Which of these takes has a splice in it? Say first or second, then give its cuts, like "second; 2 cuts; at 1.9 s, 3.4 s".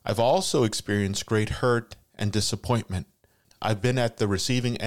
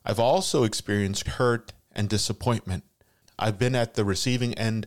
second; 1 cut; at 1.3 s